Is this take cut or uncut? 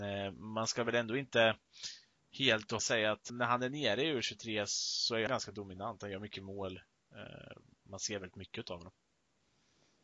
cut